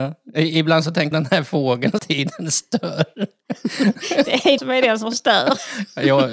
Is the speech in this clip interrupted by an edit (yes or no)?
yes